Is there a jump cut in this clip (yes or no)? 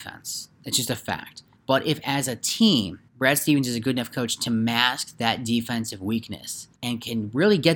yes